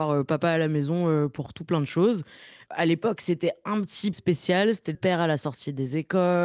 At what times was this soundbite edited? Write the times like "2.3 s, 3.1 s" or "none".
4.1 s, 4.9 s